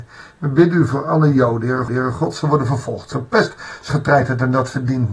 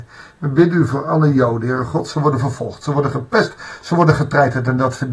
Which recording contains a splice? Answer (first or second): first